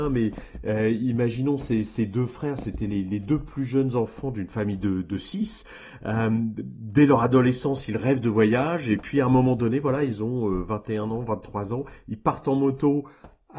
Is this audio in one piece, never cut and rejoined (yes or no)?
yes